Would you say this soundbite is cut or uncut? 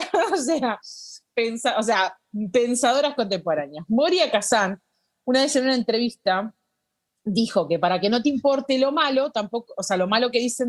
uncut